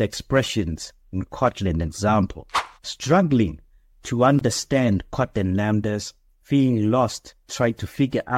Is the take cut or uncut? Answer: uncut